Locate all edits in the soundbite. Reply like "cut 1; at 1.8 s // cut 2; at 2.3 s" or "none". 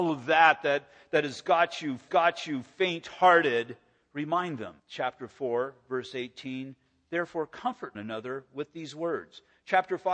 cut 1; at 2.1 s // cut 2; at 4.8 s // cut 3; at 8.0 s